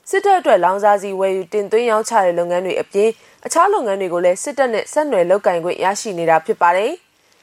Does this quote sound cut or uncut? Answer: uncut